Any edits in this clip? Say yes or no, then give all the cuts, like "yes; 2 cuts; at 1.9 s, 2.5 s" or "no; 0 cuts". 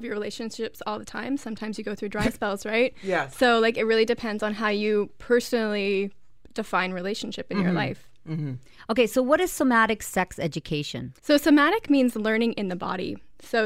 yes; 1 cut; at 11.2 s